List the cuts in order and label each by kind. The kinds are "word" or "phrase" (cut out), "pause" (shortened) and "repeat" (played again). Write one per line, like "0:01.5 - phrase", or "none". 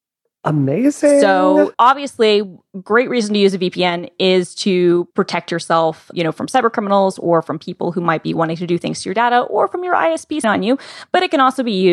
0:01.7 - word
0:05.1 - pause
0:06.1 - word
0:10.4 - word